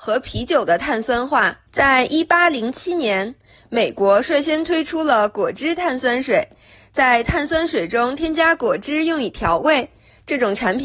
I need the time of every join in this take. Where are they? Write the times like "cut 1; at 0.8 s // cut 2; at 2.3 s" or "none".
cut 1; at 1.7 s